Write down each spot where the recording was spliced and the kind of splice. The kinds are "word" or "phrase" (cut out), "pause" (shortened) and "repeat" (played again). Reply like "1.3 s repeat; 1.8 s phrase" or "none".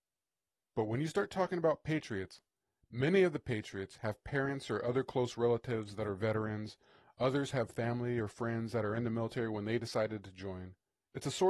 none